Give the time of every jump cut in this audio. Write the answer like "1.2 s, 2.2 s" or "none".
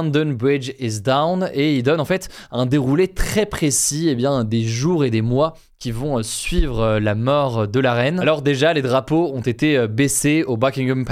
none